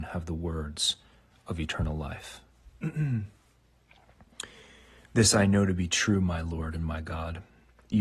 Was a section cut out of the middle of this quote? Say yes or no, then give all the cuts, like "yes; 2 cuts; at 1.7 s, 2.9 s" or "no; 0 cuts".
no; 0 cuts